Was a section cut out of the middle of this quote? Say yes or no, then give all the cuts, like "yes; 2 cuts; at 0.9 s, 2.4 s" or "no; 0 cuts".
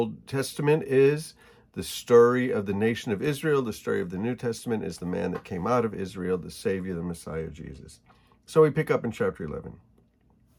no; 0 cuts